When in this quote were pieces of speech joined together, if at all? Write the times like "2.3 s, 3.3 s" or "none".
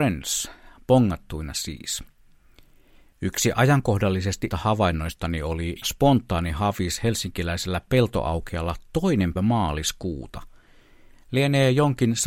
4.5 s, 5.8 s, 9.4 s